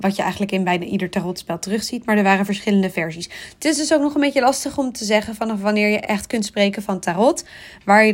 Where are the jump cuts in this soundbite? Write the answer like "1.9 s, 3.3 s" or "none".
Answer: none